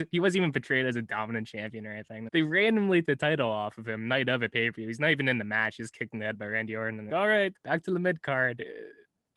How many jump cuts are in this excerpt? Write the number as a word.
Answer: five